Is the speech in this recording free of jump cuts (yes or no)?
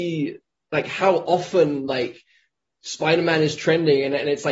yes